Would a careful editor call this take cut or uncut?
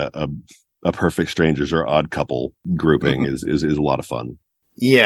uncut